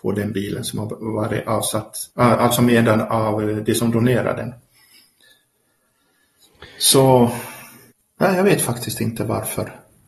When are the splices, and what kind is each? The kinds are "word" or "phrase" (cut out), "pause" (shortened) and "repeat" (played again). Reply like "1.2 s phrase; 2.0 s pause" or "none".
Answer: 2.1 s pause; 7.9 s pause